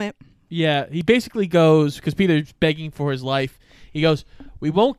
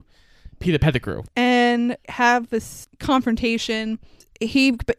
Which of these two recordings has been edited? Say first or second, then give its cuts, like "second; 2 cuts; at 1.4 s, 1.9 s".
second; 1 cut; at 2.0 s